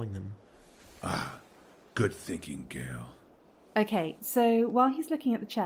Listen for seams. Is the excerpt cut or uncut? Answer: cut